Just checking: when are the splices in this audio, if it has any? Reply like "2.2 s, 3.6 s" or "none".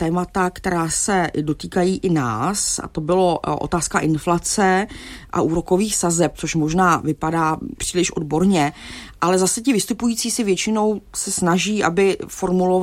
7.8 s

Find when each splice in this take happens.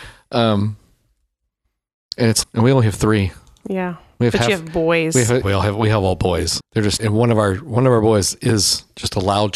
2.4 s, 5.4 s, 6.6 s, 7.0 s

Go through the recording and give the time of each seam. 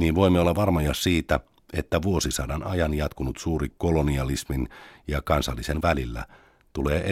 3.7 s, 5.8 s

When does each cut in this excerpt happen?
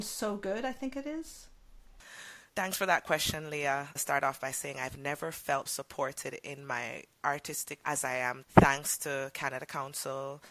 2.5 s, 4.0 s, 5.7 s, 7.8 s, 8.4 s

